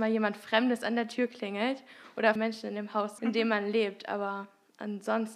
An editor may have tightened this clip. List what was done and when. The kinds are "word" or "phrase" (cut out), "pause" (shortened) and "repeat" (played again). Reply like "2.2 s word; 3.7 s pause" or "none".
2.4 s word; 3.2 s word